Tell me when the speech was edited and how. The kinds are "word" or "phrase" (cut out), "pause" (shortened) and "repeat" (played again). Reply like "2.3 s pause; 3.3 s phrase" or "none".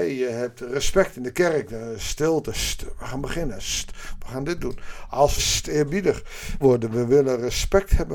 5.4 s phrase; 6.6 s phrase